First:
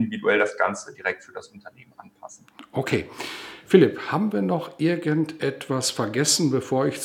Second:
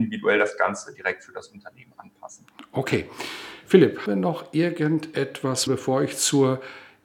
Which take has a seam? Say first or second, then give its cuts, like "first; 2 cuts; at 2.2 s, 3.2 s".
second; 2 cuts; at 4.1 s, 5.7 s